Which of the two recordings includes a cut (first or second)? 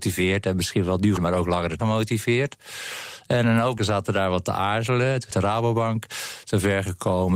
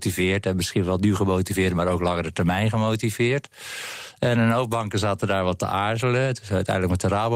first